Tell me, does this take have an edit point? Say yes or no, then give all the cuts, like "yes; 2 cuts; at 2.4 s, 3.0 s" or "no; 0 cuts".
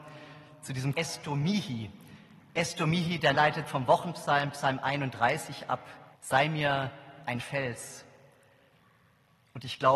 yes; 5 cuts; at 0.9 s, 3.3 s, 3.7 s, 6.1 s, 7.4 s